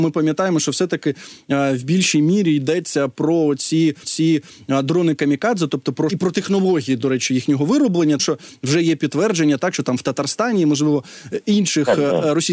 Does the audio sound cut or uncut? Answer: cut